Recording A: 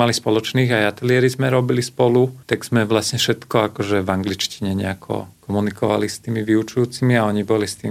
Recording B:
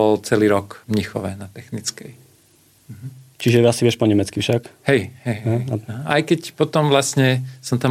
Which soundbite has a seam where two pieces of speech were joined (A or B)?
A